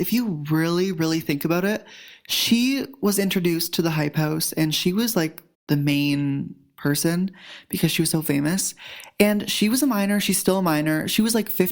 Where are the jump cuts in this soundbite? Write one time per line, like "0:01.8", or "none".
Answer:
0:05.5